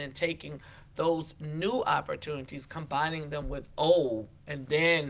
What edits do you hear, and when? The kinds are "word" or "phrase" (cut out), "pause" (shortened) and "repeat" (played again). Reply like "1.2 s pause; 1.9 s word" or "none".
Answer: none